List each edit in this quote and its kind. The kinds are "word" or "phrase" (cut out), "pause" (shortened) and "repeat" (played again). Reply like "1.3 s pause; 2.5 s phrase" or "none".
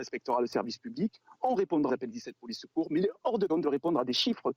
1.9 s word; 3.5 s word